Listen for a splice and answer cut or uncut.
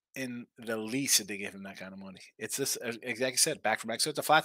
uncut